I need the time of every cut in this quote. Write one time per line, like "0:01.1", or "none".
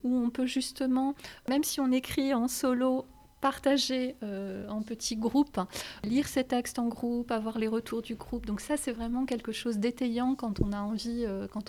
none